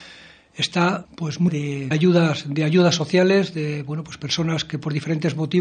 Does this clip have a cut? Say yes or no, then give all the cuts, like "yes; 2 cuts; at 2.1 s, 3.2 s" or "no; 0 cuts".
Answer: yes; 3 cuts; at 1.0 s, 1.5 s, 1.9 s